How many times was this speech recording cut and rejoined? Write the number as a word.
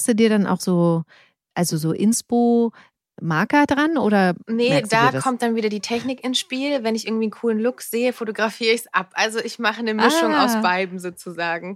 zero